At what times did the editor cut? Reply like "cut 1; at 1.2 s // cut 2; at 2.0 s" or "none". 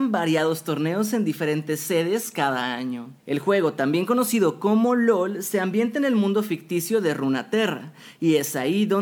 cut 1; at 3.2 s

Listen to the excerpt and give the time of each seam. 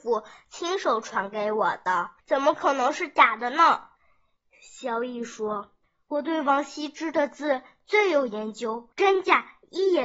cut 1; at 2.2 s // cut 2; at 4.0 s // cut 3; at 5.8 s // cut 4; at 8.9 s

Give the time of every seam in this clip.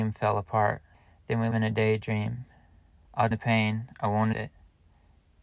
cut 1; at 0.9 s // cut 2; at 1.5 s // cut 3; at 3.3 s // cut 4; at 4.3 s

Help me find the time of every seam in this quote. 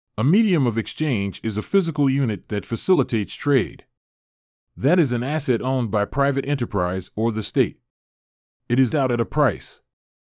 cut 1; at 8.9 s

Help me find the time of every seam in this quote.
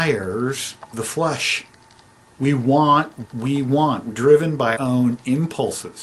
cut 1; at 0.9 s // cut 2; at 3.2 s // cut 3; at 4.1 s // cut 4; at 4.8 s

